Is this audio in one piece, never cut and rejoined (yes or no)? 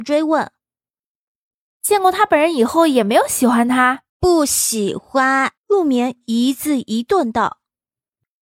no